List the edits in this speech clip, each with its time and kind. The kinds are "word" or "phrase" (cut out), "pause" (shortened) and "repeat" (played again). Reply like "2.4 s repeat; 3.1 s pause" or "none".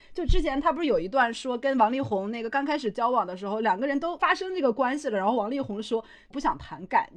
none